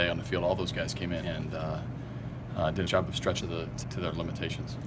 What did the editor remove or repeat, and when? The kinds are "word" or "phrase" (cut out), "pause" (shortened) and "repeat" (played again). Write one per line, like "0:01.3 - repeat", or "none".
0:01.2 - word
0:02.9 - word
0:03.4 - word
0:03.8 - word